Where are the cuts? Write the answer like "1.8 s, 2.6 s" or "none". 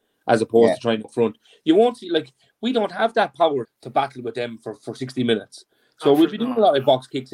1.0 s, 3.6 s